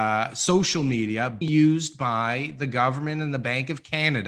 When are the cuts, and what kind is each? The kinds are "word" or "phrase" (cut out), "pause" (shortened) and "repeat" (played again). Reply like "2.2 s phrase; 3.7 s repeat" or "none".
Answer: 1.4 s word